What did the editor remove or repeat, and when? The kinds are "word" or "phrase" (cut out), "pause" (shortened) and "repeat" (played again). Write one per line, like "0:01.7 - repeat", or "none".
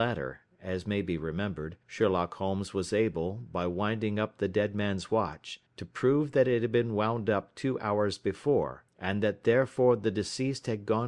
0:01.8 - pause
0:05.7 - pause
0:08.9 - pause